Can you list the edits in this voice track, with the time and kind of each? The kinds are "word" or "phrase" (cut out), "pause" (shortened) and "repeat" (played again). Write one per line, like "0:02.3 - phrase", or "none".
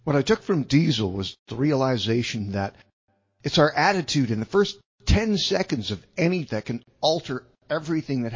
0:06.5 - word